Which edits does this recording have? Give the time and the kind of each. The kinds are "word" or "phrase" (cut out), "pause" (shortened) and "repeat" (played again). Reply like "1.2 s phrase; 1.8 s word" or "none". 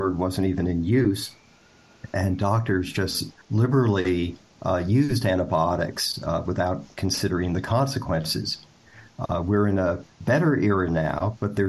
3.4 s pause; 10.1 s pause

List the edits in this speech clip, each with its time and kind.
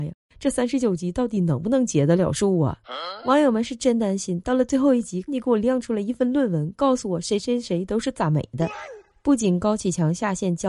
5.3 s word; 9.1 s pause

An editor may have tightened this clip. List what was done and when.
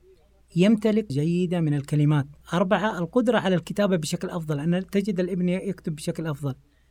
1.1 s word; 2.4 s pause

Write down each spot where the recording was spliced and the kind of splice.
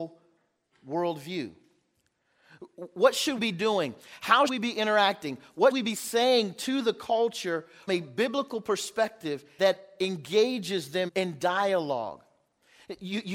3.4 s word; 4.5 s word; 5.7 s word; 7.9 s word; 9.6 s word; 11.1 s word

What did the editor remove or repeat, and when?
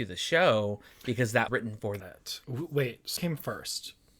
1.5 s word; 2.0 s phrase; 2.4 s pause; 3.2 s word

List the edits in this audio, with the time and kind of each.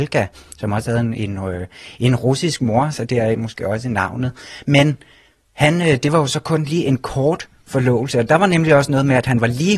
none

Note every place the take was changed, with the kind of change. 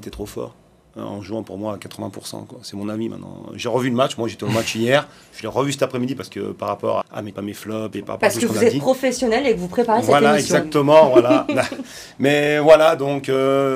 7.0 s word; 7.3 s word

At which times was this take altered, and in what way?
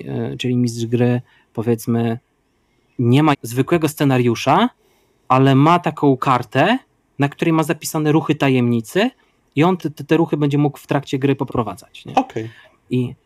3.3 s word; 9.8 s word; 11.5 s word

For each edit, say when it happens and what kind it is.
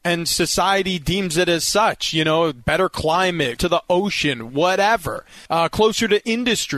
3.6 s word; 5.5 s pause

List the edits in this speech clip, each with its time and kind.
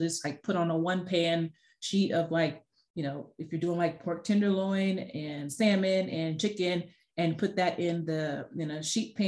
none

